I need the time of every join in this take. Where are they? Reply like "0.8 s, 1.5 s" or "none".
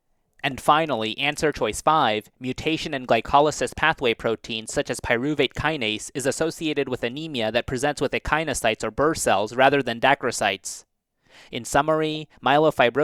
none